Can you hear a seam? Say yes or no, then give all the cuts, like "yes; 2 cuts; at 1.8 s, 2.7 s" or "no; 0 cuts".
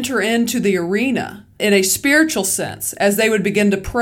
yes; 1 cut; at 1.6 s